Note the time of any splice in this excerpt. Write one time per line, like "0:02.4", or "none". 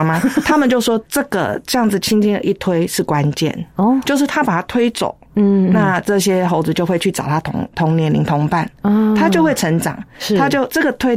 none